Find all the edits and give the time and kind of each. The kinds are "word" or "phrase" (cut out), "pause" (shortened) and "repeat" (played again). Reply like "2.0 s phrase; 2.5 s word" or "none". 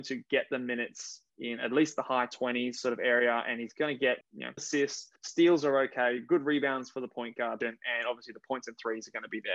1.3 s pause; 4.2 s word; 4.6 s word; 5.2 s pause; 7.6 s word